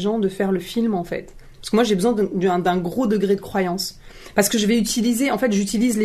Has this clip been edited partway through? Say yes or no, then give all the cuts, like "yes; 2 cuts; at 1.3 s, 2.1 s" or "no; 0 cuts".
no; 0 cuts